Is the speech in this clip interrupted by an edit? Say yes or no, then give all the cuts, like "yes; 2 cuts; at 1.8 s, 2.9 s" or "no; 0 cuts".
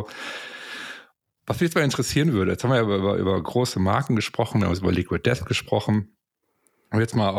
no; 0 cuts